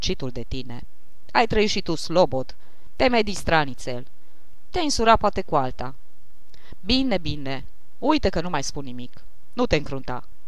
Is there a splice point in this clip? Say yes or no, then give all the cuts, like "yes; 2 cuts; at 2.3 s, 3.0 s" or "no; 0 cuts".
no; 0 cuts